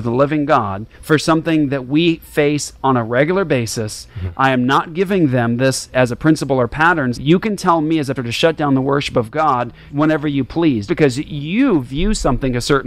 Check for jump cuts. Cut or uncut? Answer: cut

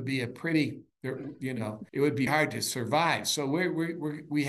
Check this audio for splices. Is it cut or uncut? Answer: cut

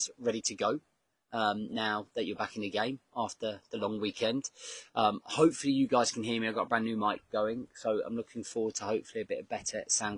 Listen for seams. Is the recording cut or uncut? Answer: uncut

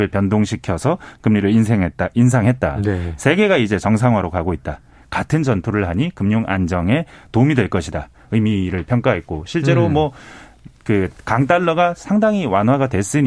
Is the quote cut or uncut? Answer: uncut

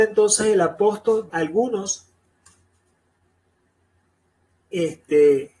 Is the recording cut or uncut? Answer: cut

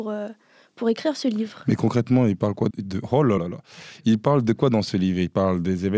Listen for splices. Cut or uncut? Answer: cut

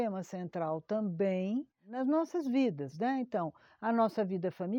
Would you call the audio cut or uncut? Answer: uncut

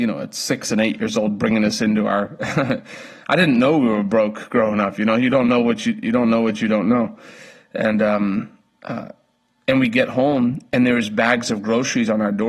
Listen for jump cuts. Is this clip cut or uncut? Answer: uncut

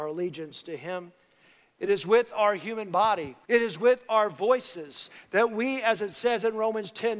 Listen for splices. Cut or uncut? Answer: cut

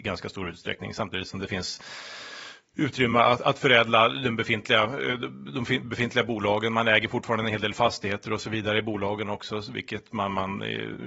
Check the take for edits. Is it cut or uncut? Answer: uncut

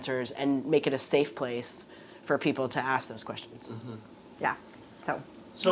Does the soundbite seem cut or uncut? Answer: uncut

